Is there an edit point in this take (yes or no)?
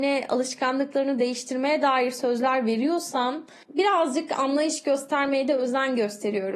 no